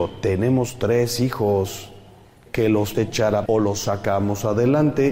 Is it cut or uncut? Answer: cut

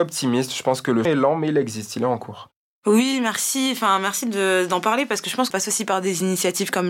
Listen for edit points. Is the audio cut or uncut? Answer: cut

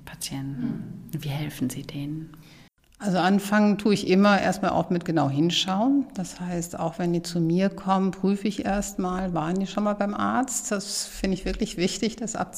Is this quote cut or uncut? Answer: cut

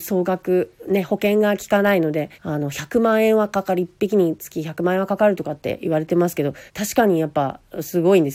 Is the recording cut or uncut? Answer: cut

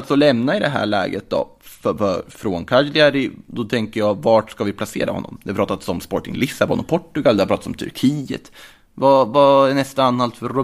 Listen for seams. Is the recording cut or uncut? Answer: uncut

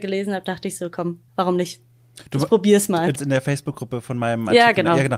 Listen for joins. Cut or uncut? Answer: cut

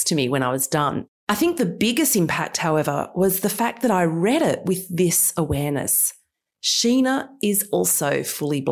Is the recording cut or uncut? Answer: uncut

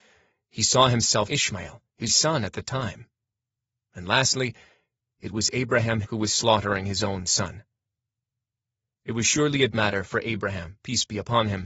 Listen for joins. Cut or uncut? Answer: cut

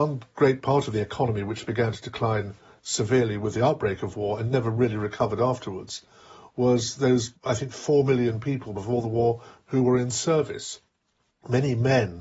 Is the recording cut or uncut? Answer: uncut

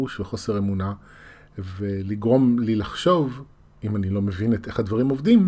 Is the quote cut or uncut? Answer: uncut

